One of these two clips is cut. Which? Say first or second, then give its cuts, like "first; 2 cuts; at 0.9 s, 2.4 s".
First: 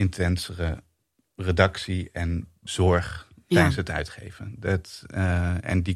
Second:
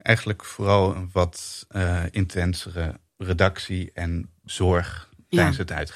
second; 1 cut; at 3.1 s